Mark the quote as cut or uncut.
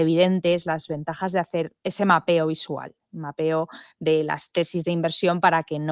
cut